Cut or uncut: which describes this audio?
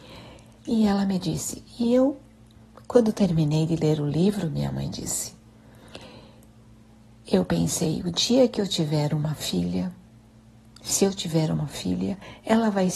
uncut